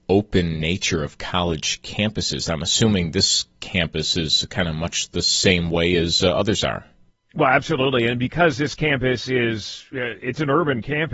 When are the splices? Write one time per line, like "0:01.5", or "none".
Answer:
none